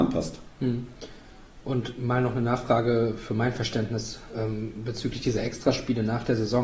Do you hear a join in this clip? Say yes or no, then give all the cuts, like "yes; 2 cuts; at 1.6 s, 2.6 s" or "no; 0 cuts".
no; 0 cuts